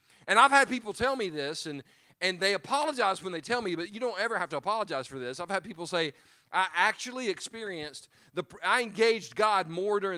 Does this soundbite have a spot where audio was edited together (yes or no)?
no